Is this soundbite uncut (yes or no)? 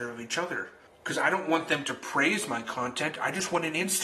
yes